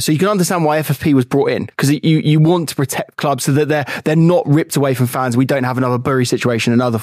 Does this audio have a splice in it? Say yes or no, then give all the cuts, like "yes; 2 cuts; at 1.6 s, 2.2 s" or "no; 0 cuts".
no; 0 cuts